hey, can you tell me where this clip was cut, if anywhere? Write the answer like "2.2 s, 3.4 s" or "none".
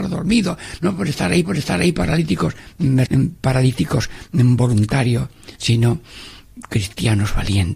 1.4 s, 3.1 s, 5.6 s